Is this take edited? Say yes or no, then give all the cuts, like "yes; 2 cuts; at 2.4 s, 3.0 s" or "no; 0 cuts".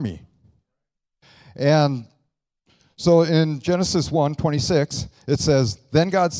no; 0 cuts